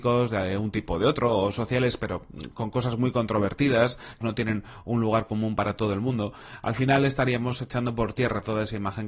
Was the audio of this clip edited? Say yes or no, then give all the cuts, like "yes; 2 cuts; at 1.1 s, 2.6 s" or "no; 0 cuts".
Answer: yes; 1 cut; at 4.2 s